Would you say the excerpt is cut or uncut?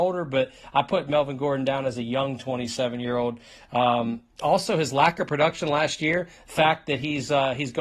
uncut